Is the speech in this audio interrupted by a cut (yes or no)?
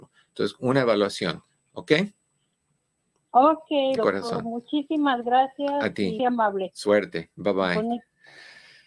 yes